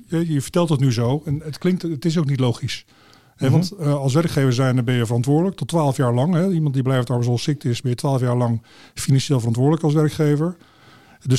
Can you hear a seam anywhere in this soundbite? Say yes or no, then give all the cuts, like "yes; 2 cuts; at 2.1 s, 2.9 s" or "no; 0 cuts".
no; 0 cuts